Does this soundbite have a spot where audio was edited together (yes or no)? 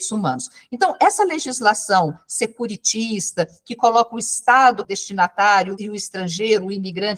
yes